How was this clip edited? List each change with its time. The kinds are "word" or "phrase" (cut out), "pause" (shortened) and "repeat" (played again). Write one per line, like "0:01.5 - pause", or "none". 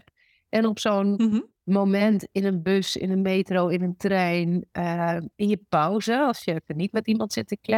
none